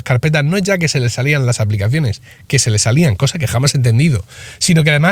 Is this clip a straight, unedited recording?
yes; 0 cuts

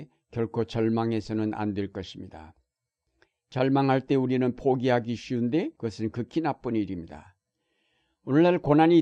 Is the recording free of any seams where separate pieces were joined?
no; 1 cut; at 5.8 s

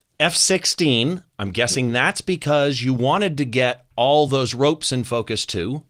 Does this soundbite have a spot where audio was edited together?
no; 0 cuts

